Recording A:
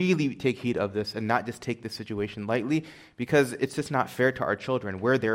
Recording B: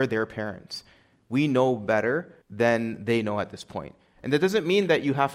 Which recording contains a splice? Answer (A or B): B